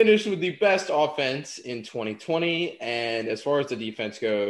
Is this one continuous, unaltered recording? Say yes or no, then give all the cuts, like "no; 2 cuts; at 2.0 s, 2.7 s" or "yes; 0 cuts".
yes; 0 cuts